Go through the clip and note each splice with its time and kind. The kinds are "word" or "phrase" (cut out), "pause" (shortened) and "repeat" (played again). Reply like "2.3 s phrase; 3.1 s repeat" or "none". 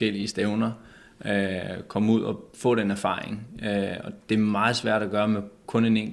none